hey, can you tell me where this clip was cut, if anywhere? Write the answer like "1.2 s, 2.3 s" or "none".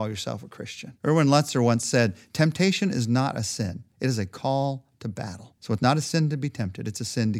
1.0 s, 3.9 s, 5.6 s